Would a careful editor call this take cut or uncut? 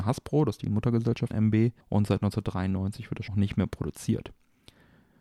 cut